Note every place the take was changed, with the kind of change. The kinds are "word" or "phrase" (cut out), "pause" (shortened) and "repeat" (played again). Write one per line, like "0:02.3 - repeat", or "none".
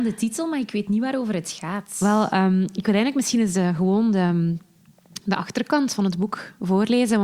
none